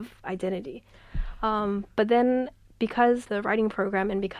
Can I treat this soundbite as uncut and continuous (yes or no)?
no